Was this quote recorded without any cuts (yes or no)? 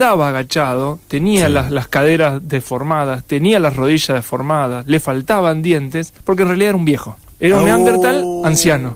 no